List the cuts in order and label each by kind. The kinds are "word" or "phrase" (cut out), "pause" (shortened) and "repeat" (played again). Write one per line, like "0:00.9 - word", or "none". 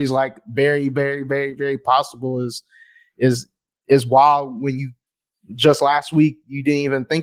none